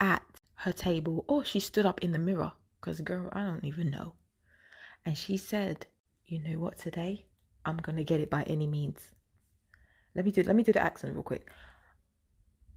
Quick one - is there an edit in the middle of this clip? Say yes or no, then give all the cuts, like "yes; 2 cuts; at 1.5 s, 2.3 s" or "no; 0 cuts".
no; 0 cuts